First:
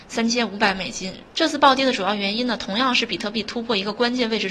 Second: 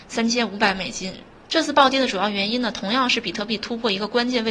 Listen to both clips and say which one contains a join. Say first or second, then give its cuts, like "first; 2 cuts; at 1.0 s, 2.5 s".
first; 1 cut; at 1.3 s